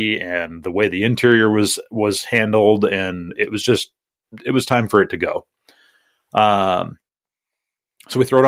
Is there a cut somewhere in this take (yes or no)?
no